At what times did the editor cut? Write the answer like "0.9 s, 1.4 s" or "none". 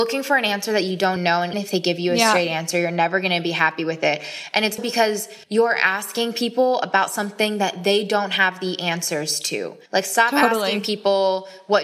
1.2 s, 1.5 s, 4.8 s, 5.4 s, 9.9 s